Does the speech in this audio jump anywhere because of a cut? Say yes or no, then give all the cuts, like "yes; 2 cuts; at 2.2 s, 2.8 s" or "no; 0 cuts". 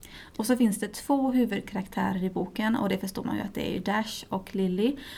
no; 0 cuts